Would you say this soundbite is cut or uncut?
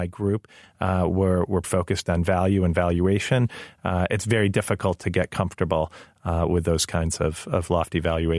cut